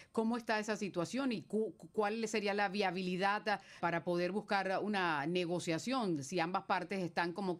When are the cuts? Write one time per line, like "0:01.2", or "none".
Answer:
0:03.8